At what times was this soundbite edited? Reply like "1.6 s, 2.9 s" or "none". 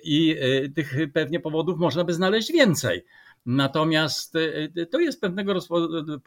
none